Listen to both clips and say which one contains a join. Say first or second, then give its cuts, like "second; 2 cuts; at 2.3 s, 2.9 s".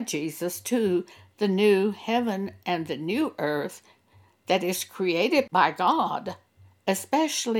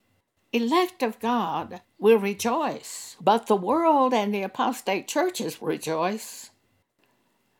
second; 3 cuts; at 1.9 s, 3.2 s, 5.6 s